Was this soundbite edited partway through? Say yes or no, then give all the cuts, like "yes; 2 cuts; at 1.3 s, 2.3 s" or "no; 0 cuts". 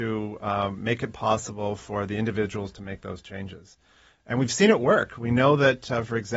no; 0 cuts